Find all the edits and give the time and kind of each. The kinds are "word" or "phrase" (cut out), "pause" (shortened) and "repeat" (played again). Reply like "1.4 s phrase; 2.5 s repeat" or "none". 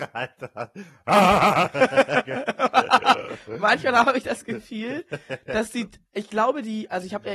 none